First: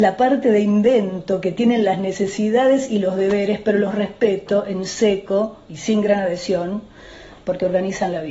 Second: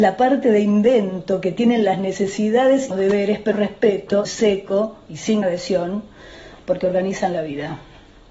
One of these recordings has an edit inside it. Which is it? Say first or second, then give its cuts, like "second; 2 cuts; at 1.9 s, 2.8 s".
second; 4 cuts; at 2.9 s, 3.5 s, 4.3 s, 5.4 s